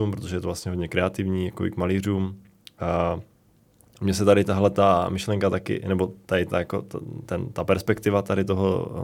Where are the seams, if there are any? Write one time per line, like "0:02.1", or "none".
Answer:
none